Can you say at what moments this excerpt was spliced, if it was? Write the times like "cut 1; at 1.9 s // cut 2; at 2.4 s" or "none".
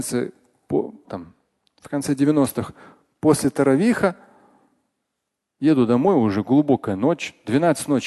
cut 1; at 1.0 s